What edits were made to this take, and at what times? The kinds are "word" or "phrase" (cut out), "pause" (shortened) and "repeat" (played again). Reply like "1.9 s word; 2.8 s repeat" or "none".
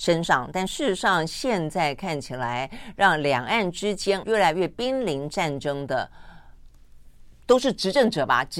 4.2 s word